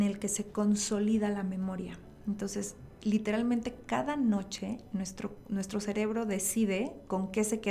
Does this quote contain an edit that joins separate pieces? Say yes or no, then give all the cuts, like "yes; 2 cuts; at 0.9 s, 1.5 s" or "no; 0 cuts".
no; 0 cuts